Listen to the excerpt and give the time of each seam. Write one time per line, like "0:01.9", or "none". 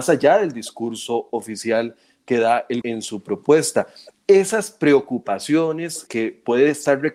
0:02.8
0:06.1